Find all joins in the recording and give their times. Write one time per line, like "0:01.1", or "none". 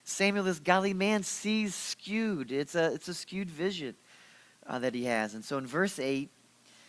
none